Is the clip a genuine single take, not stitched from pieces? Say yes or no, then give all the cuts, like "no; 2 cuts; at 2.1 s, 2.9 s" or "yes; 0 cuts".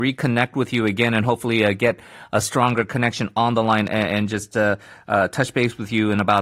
yes; 0 cuts